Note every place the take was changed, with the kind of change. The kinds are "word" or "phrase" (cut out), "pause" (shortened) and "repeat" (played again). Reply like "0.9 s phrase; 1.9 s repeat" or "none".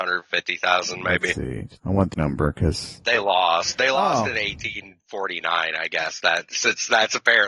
1.8 s pause; 2.1 s word